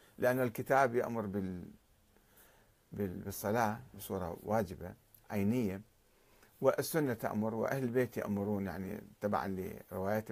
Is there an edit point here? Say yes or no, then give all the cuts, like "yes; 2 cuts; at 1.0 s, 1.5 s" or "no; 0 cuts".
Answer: no; 0 cuts